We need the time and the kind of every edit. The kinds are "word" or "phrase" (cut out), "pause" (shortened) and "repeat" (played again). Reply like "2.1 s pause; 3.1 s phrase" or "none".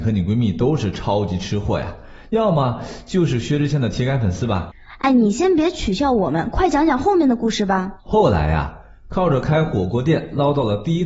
8.0 s pause

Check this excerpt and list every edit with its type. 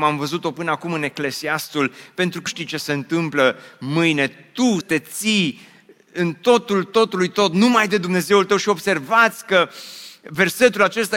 2.5 s word; 4.8 s word

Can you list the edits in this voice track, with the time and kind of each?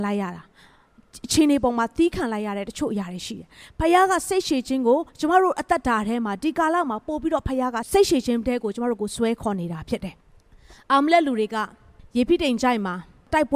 5.1 s pause; 10.2 s pause; 12.0 s pause

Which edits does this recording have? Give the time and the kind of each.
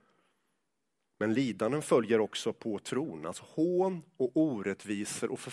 none

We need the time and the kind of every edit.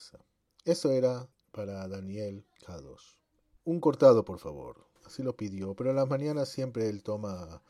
2.6 s pause; 5.0 s pause

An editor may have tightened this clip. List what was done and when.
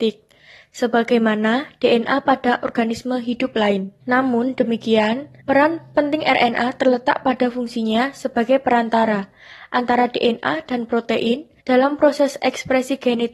4.0 s pause; 5.4 s pause; 11.6 s pause

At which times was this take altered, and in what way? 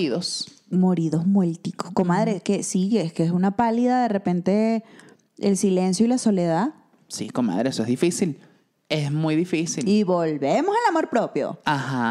none

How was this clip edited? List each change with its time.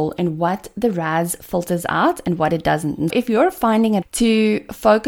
3.1 s word; 4.0 s word

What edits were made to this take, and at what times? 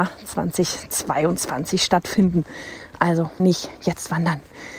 3.4 s word

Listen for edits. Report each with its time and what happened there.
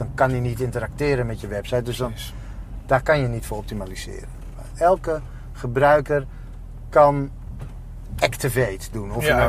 none

